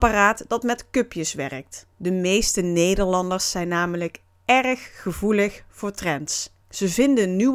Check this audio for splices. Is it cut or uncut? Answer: cut